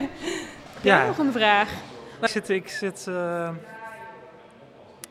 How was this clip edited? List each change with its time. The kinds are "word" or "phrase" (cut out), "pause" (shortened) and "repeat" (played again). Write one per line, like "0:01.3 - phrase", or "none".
0:02.3 - phrase